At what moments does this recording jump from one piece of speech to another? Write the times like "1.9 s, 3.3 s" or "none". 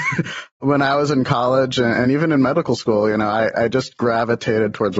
none